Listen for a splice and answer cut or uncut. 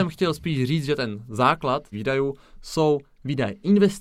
cut